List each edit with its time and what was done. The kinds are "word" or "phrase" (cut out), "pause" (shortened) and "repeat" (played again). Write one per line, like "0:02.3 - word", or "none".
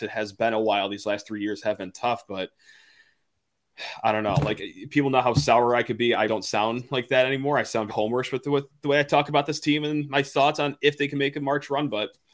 0:06.3 - word
0:07.9 - word